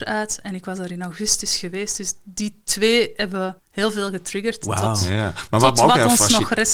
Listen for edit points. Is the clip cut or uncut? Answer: cut